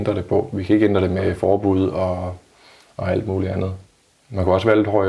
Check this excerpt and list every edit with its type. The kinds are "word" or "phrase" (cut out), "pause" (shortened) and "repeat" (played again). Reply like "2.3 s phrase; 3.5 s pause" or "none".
none